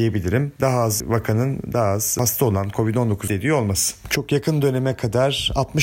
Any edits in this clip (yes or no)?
yes